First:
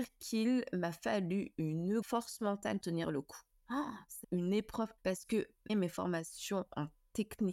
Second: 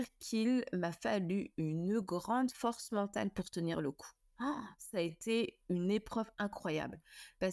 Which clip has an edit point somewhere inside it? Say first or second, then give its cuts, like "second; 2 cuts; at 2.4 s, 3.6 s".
first; 5 cuts; at 2.0 s, 2.8 s, 4.2 s, 5.0 s, 5.7 s